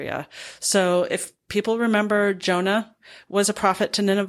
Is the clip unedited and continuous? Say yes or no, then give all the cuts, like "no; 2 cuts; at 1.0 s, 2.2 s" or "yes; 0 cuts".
yes; 0 cuts